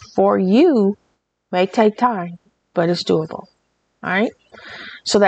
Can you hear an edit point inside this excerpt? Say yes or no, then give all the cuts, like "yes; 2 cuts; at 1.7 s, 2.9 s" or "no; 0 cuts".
no; 0 cuts